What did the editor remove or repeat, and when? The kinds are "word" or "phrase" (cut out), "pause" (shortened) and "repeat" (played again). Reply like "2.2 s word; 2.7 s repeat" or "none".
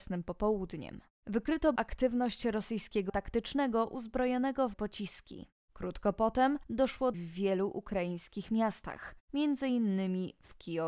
1.8 s word; 3.1 s word; 4.7 s word; 7.1 s phrase